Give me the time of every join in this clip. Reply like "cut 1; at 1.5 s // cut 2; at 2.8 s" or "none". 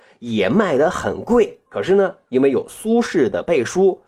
cut 1; at 1.7 s